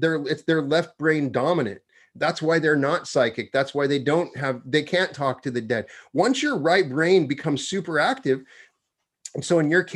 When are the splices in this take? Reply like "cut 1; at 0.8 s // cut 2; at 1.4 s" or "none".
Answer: none